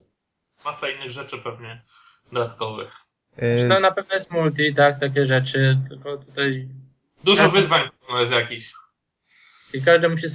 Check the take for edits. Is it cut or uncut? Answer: uncut